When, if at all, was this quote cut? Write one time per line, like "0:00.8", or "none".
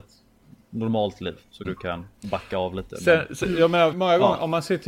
0:01.6
0:03.9